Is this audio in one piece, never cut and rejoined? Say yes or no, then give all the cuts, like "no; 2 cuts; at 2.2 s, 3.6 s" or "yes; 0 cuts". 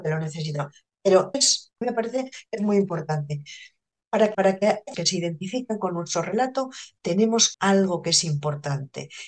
no; 5 cuts; at 1.3 s, 1.8 s, 4.3 s, 4.9 s, 7.5 s